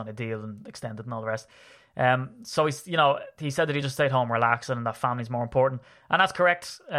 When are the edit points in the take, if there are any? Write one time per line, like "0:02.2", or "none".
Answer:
none